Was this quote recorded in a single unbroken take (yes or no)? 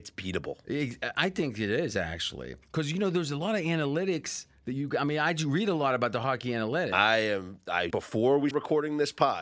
no